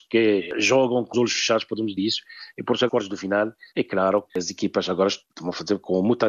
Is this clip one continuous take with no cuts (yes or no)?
no